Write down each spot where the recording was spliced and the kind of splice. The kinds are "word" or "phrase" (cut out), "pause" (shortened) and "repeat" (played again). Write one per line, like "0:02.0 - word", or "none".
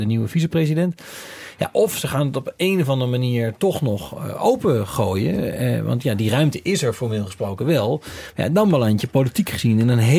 none